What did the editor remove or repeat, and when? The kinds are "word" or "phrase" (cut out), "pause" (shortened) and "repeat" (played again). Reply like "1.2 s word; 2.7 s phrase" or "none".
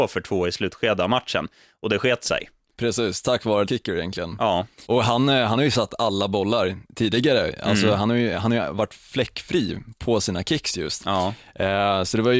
3.7 s word; 4.9 s pause